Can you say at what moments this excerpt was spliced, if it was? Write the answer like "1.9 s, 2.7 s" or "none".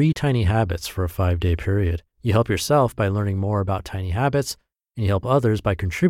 2.1 s